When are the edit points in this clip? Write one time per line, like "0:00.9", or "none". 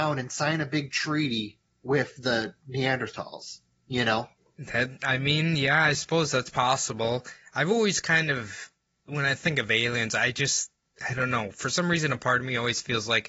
none